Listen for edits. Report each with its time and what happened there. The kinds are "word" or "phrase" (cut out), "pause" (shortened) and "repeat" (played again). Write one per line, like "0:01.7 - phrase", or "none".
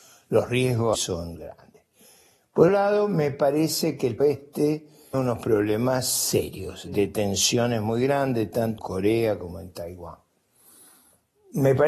0:00.9 - word
0:02.7 - word
0:04.2 - word
0:05.1 - word
0:08.8 - word